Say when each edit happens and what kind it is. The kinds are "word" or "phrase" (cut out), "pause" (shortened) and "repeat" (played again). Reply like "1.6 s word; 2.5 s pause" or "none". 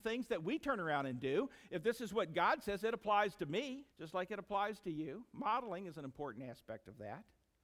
3.9 s pause